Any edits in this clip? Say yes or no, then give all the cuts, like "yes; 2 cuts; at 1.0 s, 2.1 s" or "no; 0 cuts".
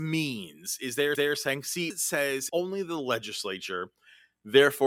yes; 3 cuts; at 1.1 s, 1.9 s, 2.5 s